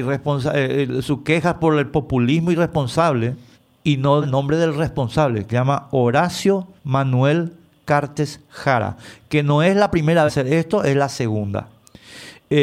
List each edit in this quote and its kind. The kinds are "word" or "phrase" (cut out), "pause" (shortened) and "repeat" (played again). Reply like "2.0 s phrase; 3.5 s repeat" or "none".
3.5 s pause; 4.2 s word; 5.5 s word; 6.8 s pause; 10.3 s phrase